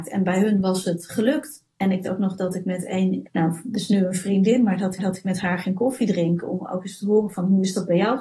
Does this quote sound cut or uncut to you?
cut